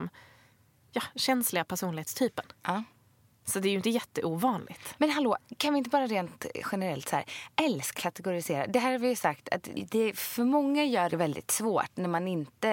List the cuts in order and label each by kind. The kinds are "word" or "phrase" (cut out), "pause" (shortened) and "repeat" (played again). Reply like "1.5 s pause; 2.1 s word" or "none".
8.0 s phrase; 9.7 s word; 11.1 s phrase